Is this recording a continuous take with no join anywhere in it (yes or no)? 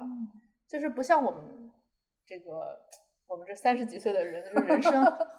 yes